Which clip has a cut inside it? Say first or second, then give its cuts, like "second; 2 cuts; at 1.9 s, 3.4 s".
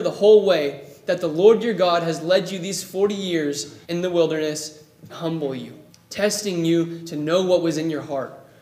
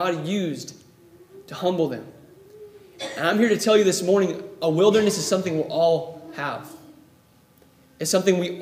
first; 3 cuts; at 3.8 s, 5.1 s, 5.9 s